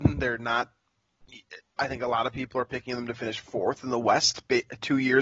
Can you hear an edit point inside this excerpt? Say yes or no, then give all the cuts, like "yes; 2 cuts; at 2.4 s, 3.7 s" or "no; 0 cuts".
no; 0 cuts